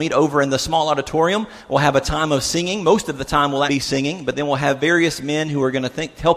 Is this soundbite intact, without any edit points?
no; 1 cut; at 3.7 s

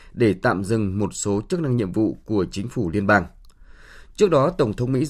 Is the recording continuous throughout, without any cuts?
yes; 0 cuts

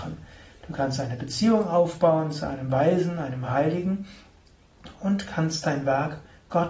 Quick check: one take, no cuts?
yes; 0 cuts

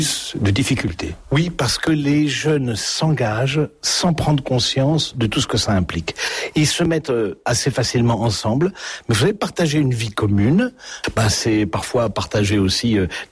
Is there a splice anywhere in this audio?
no; 0 cuts

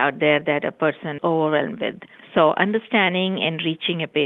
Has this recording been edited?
yes; 2 cuts; at 1.2 s, 2.2 s

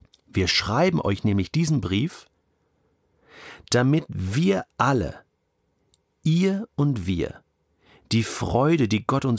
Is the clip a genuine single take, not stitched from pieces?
yes; 0 cuts

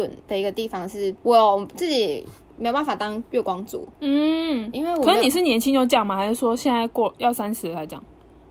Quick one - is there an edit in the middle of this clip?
yes; 1 cut; at 4.7 s

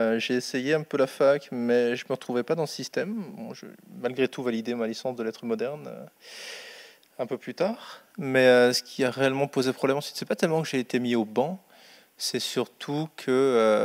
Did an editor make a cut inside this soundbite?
no; 0 cuts

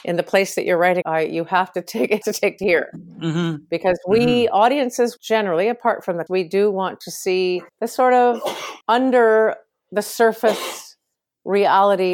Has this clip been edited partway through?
yes; 7 cuts; at 1.0 s, 2.2 s, 2.6 s, 5.2 s, 6.3 s, 7.7 s, 8.8 s

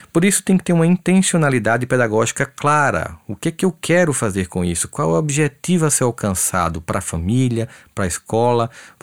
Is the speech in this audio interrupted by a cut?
no; 0 cuts

